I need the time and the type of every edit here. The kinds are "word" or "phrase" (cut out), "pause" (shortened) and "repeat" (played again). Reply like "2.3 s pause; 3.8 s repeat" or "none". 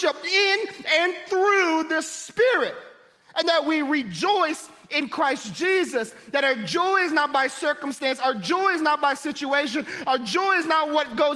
none